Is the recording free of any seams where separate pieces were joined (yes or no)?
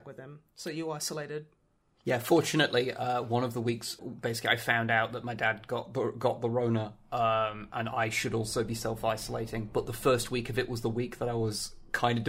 no